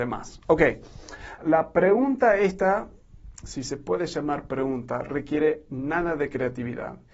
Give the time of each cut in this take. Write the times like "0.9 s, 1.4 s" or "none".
1.4 s